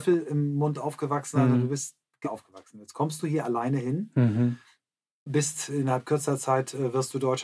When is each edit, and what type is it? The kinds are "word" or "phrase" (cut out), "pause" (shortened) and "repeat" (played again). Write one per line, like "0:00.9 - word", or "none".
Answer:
0:02.2 - word